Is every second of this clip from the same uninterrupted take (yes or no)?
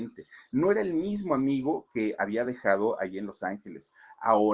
yes